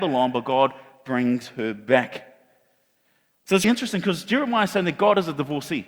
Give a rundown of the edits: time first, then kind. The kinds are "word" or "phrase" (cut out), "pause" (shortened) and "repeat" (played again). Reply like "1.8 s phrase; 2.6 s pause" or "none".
3.6 s word

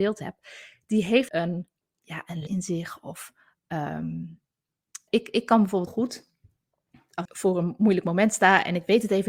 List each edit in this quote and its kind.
1.3 s word; 1.8 s word; 2.5 s word; 5.1 s word; 5.9 s word; 7.2 s word

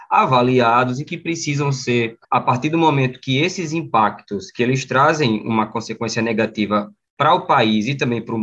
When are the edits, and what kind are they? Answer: 2.2 s pause

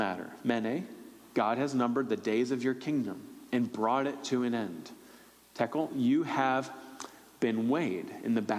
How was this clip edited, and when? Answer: none

